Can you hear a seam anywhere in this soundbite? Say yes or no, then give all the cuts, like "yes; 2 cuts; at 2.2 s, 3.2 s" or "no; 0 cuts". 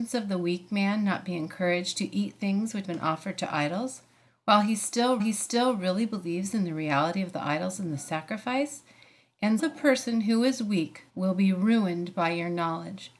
yes; 4 cuts; at 2.8 s, 5.2 s, 9.6 s, 11.1 s